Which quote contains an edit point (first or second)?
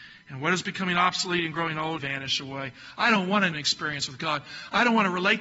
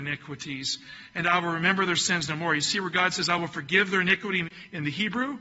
first